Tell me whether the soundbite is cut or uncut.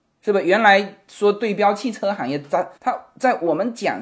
cut